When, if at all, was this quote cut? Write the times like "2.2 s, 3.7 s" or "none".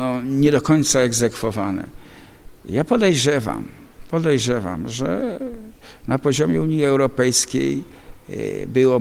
none